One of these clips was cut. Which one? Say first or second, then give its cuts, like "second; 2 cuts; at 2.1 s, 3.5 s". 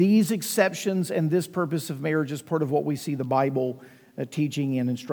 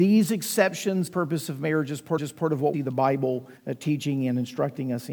second; 4 cuts; at 1.1 s, 2.2 s, 2.7 s, 3.6 s